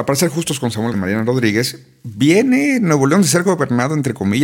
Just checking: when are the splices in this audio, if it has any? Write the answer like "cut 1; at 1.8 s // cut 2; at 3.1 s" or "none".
cut 1; at 0.9 s

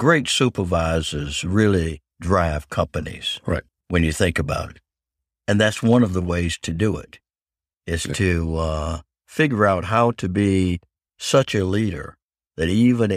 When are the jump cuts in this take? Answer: cut 1; at 2.1 s // cut 2; at 3.7 s

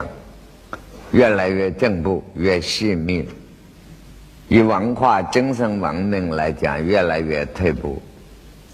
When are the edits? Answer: cut 1; at 4.4 s

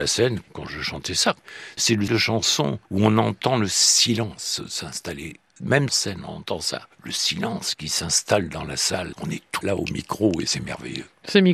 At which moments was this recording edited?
cut 1; at 2.1 s // cut 2; at 5.9 s // cut 3; at 9.1 s // cut 4; at 9.6 s

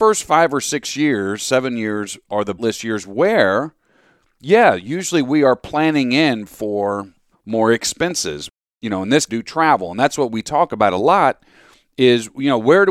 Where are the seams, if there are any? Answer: cut 1; at 2.6 s // cut 2; at 7.3 s // cut 3; at 9.3 s

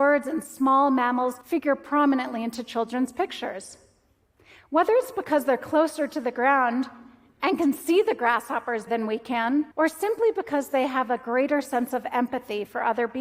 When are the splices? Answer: cut 1; at 1.4 s // cut 2; at 8.9 s // cut 3; at 9.7 s

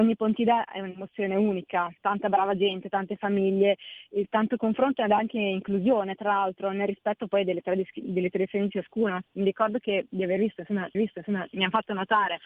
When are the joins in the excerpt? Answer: cut 1; at 2.0 s // cut 2; at 10.9 s

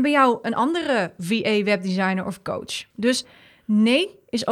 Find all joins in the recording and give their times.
cut 1; at 2.9 s

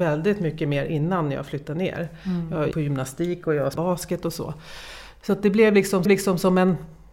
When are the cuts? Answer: cut 1; at 2.7 s // cut 2; at 3.8 s // cut 3; at 6.1 s

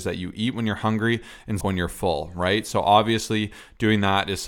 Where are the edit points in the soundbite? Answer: cut 1; at 1.6 s

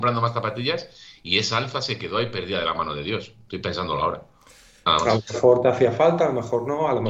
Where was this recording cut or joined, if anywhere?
none

